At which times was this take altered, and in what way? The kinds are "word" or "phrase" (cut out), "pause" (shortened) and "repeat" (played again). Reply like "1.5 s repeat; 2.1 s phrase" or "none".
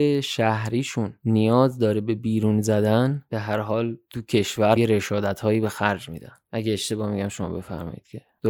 4.8 s word